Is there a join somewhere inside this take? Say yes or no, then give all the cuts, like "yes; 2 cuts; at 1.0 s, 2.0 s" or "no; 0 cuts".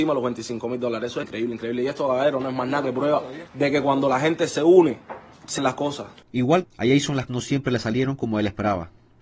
yes; 4 cuts; at 1.2 s, 5.6 s, 6.6 s, 7.3 s